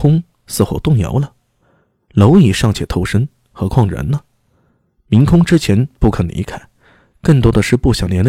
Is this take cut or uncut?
uncut